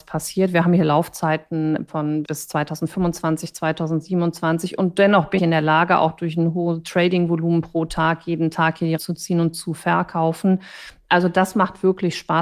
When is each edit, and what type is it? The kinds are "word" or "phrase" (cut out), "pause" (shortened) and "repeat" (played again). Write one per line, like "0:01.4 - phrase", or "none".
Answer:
0:01.9 - word
0:02.2 - word
0:05.4 - word
0:09.0 - word

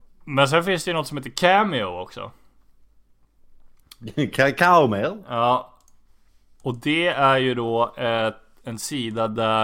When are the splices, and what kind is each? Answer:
none

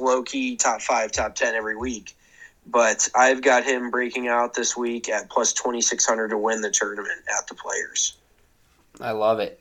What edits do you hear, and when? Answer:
none

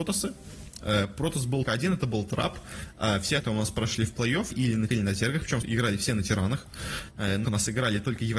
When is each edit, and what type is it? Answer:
0:01.6 - word
0:03.4 - word
0:04.5 - word
0:04.9 - word
0:05.6 - word
0:07.4 - word

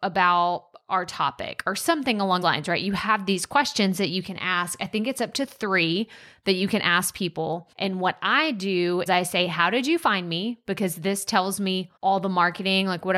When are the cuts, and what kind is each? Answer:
0:02.4 - word
0:07.7 - pause
0:09.1 - word
0:12.0 - pause

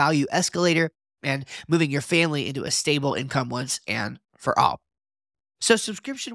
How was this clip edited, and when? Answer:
none

